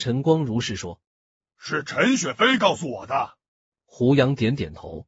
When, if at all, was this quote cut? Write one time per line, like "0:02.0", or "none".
0:01.0
0:03.5